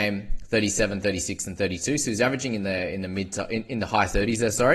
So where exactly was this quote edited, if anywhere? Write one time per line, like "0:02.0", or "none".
none